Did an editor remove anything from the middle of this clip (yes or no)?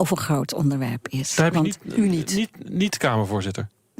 no